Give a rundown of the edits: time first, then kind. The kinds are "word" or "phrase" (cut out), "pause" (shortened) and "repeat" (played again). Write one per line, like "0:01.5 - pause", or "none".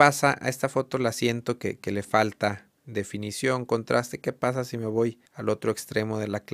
0:02.8 - pause
0:05.3 - pause